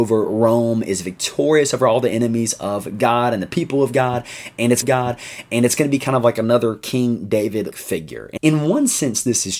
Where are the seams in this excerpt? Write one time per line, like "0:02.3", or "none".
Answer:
0:04.8
0:07.7
0:08.4